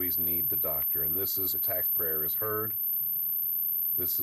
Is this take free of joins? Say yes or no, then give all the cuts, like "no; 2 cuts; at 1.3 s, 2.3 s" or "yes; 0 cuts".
no; 2 cuts; at 1.5 s, 1.8 s